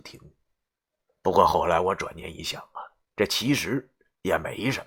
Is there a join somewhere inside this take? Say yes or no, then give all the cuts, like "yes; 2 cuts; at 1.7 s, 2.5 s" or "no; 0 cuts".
no; 0 cuts